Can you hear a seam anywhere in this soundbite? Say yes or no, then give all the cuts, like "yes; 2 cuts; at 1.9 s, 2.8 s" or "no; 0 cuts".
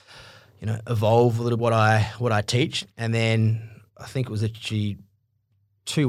yes; 3 cuts; at 1.6 s, 2.9 s, 3.9 s